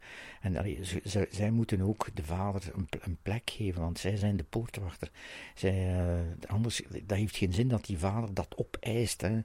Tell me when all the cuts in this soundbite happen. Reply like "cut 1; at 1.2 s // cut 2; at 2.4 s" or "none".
cut 1; at 6.5 s

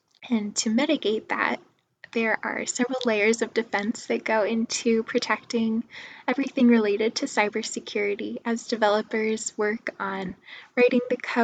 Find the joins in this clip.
none

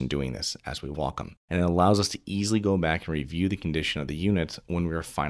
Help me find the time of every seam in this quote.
cut 1; at 1.4 s

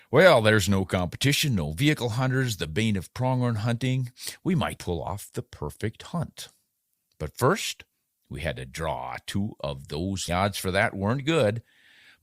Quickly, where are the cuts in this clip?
cut 1; at 4.8 s // cut 2; at 10.3 s

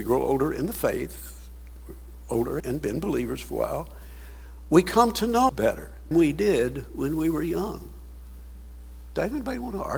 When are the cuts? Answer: cut 1; at 2.6 s // cut 2; at 5.5 s // cut 3; at 6.1 s

